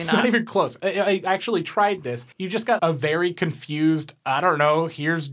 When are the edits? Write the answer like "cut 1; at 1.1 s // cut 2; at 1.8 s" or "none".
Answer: cut 1; at 2.3 s // cut 2; at 2.8 s